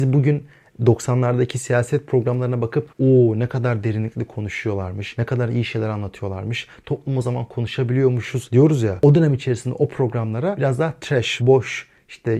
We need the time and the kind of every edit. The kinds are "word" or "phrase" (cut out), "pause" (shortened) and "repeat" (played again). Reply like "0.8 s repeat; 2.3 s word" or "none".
2.9 s pause